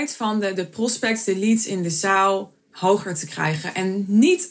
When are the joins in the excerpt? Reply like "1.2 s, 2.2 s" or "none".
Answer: 2.6 s